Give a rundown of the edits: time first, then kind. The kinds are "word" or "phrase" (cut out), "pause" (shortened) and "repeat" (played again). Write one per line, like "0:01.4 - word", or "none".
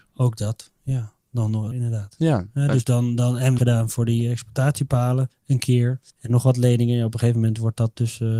0:01.2 - pause
0:01.7 - phrase
0:03.6 - phrase
0:05.3 - pause
0:06.1 - pause

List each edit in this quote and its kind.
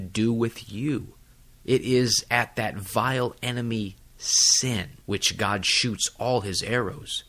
0:01.3 - pause
0:05.0 - pause

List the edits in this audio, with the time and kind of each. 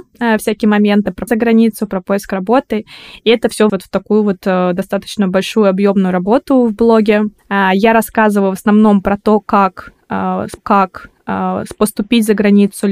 0:01.3 - word
0:03.7 - word
0:07.4 - pause
0:10.6 - repeat

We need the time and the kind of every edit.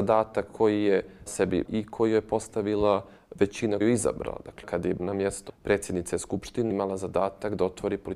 0:01.3 - word
0:01.6 - word
0:03.8 - word
0:04.6 - word
0:05.0 - word
0:05.5 - word
0:06.7 - word

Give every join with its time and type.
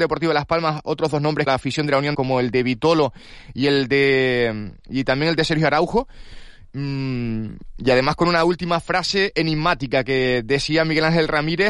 0:01.5 - phrase
0:02.1 - word

